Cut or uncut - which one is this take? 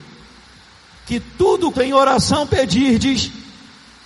cut